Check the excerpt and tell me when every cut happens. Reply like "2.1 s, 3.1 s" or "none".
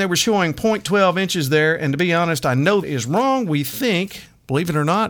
2.8 s